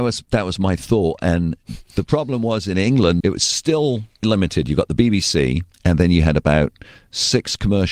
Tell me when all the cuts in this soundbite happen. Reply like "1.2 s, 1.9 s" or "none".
3.2 s, 4.2 s, 5.7 s